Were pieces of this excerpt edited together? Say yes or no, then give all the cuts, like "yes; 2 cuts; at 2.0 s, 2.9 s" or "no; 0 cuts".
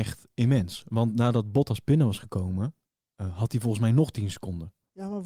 no; 0 cuts